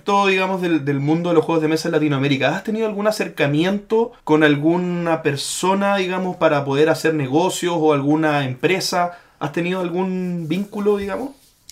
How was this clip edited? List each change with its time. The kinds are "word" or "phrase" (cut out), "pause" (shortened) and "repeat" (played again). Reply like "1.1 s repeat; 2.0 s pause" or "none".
4.2 s pause

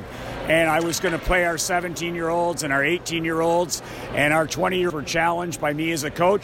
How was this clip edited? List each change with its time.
4.9 s word

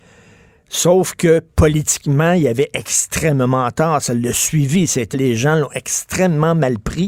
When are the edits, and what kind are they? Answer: 5.1 s word

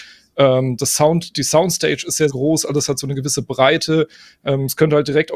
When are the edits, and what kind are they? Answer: 2.3 s word

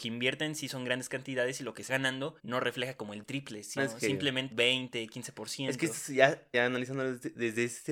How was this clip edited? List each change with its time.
1.9 s word; 2.4 s pause; 3.2 s phrase; 3.8 s word; 4.5 s word; 6.5 s word

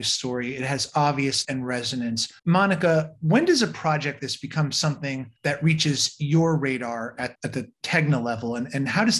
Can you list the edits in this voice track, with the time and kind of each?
1.4 s phrase; 2.4 s pause; 4.2 s word; 5.4 s pause; 7.3 s word

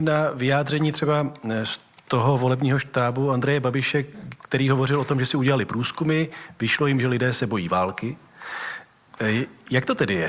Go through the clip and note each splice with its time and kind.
none

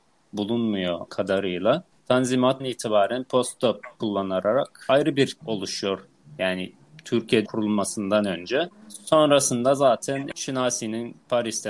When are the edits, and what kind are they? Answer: 1.1 s word; 2.6 s word; 4.0 s word; 5.4 s word; 7.5 s word

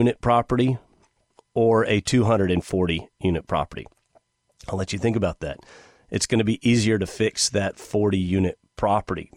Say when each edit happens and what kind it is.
none

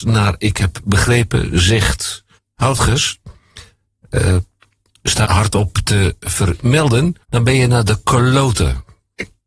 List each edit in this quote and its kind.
2.4 s pause; 5.2 s phrase; 7.2 s pause

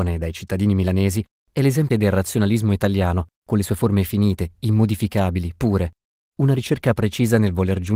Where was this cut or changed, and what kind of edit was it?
1.9 s word

